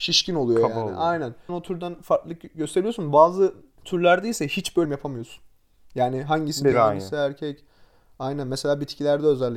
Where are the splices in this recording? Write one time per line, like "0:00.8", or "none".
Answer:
0:01.5
0:04.8
0:06.7